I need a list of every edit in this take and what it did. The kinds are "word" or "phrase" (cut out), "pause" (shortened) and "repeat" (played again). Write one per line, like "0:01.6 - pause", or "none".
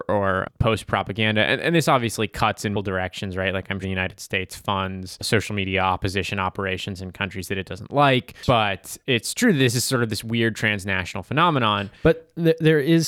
0:02.7 - word
0:03.8 - word